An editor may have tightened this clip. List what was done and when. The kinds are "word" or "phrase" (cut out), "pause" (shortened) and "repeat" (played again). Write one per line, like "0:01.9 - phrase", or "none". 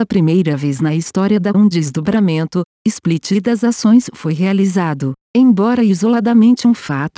0:01.5 - word

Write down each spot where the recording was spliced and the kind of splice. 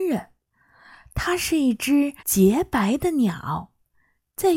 0:02.2 - pause

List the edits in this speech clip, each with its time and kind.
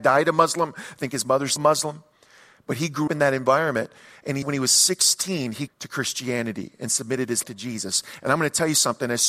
0:01.6 - word
0:03.1 - word
0:04.4 - word
0:05.7 - word
0:07.4 - word

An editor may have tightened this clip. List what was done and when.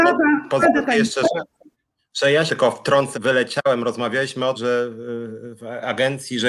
0:01.7 - pause
0:02.5 - word
0:03.1 - word
0:04.5 - word

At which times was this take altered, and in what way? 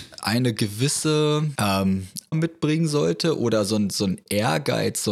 0:01.6 - phrase
0:02.3 - word

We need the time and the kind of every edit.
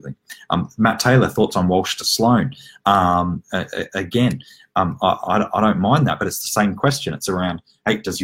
none

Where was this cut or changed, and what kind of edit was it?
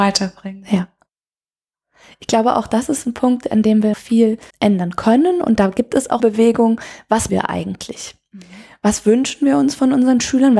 0:03.9 - word
0:04.5 - word
0:06.2 - word
0:07.3 - word

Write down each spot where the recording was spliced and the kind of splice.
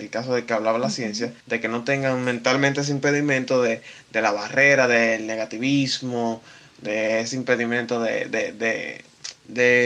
0:01.4 - pause

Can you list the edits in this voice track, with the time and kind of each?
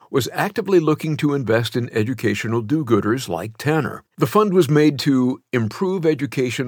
0:04.1 - pause

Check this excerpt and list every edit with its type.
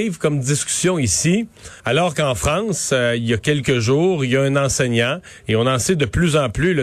0:01.8 - pause

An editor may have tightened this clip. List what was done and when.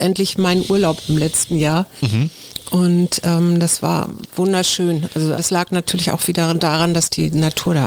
0:05.4 - word

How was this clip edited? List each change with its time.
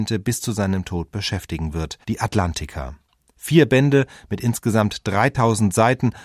0:02.0 - pause

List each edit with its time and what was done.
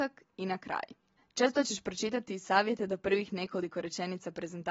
0:01.2 - pause

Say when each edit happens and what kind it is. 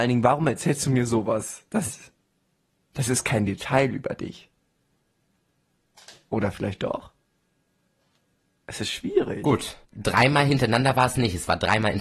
0:09.8 - pause

